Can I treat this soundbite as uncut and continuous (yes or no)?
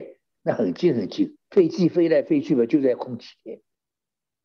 no